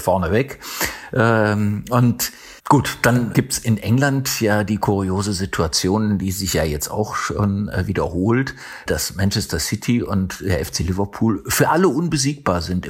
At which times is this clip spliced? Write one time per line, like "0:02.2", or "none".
0:02.6
0:03.3
0:08.9